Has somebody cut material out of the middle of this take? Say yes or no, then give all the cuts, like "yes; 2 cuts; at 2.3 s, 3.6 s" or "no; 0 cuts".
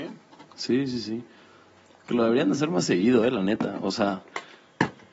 no; 0 cuts